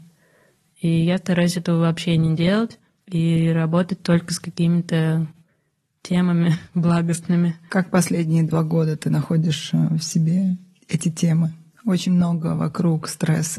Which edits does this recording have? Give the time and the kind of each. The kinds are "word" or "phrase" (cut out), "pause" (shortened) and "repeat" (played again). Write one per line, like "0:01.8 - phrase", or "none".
none